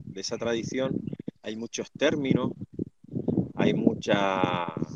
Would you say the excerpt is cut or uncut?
cut